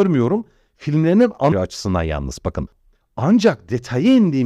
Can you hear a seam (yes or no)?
yes